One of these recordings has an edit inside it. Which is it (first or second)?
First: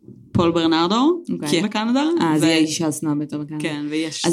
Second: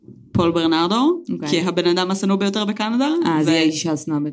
first